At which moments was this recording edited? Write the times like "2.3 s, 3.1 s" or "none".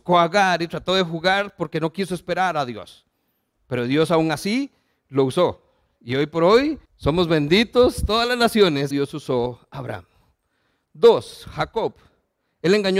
6.9 s, 8.9 s